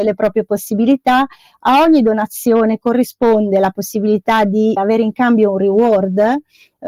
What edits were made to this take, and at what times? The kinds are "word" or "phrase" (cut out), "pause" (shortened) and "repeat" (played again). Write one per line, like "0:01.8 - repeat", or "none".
0:04.8 - word

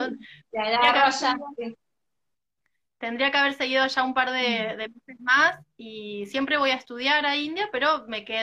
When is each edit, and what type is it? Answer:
none

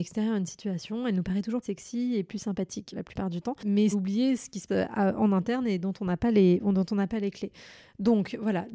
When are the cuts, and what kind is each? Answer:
0:01.6 - word
0:02.9 - word
0:03.9 - word
0:04.7 - word

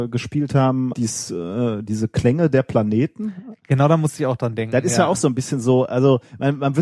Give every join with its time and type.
0:00.9 - word

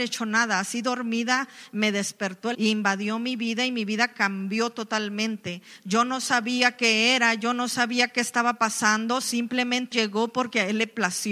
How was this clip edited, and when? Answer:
0:02.5 - phrase
0:09.9 - word

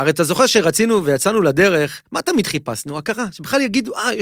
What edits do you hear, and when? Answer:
0:02.1 - pause

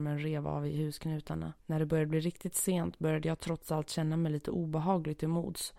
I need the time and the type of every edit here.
0:01.6 - pause

